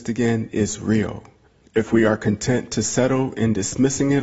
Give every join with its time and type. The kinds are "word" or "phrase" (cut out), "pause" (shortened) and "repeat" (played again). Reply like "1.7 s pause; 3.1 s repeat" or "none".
1.5 s pause